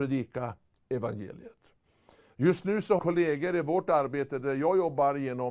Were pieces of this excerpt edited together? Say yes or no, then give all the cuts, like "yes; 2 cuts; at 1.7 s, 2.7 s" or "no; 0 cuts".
yes; 1 cut; at 3.0 s